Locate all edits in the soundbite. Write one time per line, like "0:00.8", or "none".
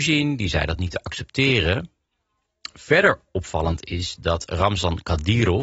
none